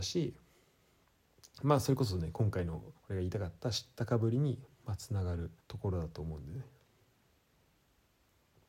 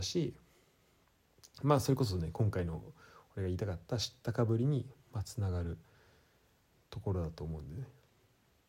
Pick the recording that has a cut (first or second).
first